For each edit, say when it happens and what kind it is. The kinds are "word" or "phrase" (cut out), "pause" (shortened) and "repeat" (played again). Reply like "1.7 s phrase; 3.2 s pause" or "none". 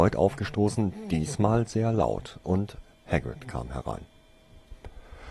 none